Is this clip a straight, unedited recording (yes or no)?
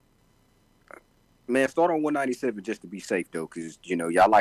yes